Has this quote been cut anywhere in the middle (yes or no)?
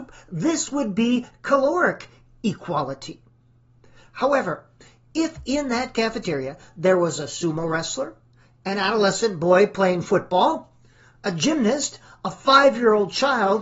no